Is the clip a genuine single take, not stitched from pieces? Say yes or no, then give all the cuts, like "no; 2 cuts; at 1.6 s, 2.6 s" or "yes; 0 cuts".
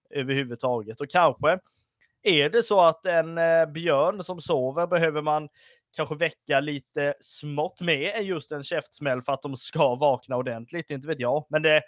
yes; 0 cuts